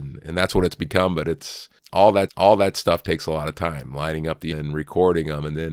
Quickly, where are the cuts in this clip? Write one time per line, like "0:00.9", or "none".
0:02.3
0:04.5